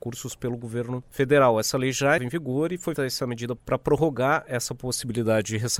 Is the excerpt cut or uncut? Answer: cut